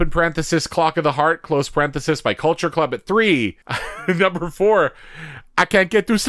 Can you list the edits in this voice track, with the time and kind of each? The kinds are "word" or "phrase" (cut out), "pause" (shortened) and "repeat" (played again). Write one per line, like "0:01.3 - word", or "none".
0:03.6 - pause